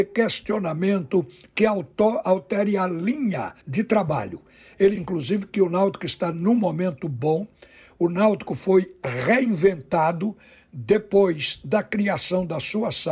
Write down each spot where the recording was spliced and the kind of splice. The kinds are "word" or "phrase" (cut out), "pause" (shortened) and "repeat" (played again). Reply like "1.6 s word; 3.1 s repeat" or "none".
3.6 s pause; 5.0 s word